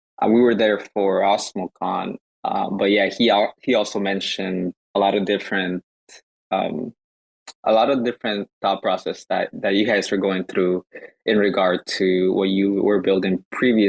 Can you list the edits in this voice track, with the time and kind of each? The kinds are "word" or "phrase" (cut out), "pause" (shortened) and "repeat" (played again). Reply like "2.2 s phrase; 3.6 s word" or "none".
4.8 s pause; 7.6 s pause